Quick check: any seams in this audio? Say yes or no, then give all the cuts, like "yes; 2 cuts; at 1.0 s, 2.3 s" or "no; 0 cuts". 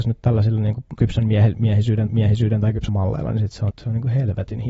yes; 4 cuts; at 0.9 s, 2.1 s, 2.9 s, 3.7 s